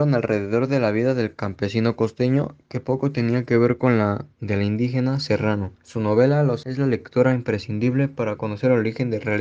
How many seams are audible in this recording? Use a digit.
3